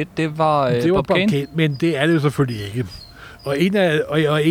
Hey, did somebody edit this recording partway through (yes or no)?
no